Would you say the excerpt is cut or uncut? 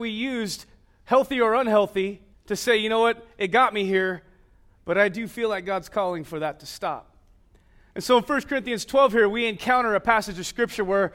cut